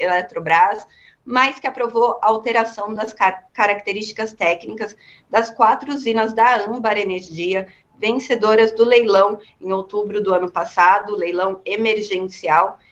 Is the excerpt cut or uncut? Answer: uncut